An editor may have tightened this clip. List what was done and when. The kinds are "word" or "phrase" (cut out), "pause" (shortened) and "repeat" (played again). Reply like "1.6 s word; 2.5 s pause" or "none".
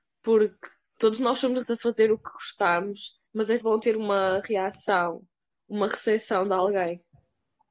1.0 s word; 1.6 s word; 3.3 s pause; 3.6 s word